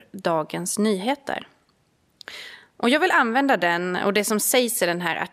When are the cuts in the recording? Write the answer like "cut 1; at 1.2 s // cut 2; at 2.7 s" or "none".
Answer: none